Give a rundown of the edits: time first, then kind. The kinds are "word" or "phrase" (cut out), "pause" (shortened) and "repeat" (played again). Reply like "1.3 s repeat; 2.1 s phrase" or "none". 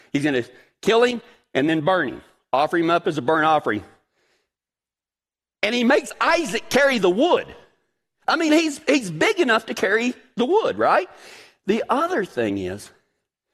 none